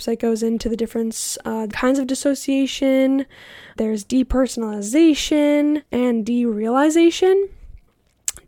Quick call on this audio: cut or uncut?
cut